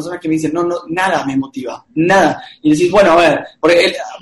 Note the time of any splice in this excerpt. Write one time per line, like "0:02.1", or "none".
none